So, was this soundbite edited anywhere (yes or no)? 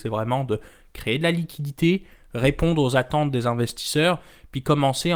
no